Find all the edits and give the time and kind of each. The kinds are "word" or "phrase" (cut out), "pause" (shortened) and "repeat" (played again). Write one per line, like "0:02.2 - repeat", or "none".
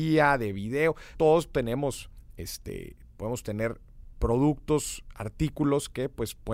0:01.1 - word